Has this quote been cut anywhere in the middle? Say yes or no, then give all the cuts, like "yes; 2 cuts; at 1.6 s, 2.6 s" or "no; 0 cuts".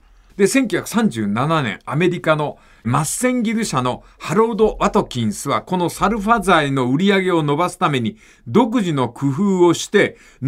no; 0 cuts